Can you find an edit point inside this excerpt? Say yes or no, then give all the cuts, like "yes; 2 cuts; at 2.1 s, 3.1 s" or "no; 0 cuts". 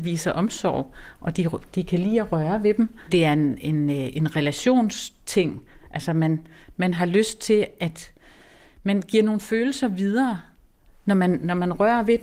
no; 0 cuts